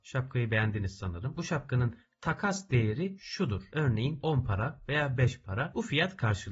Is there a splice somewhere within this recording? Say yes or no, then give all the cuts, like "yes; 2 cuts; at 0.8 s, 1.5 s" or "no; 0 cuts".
no; 0 cuts